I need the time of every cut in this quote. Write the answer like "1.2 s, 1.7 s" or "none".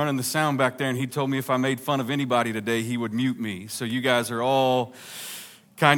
none